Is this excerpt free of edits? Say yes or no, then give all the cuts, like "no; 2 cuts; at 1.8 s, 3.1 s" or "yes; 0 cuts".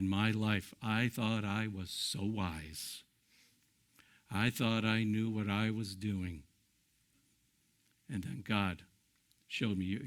yes; 0 cuts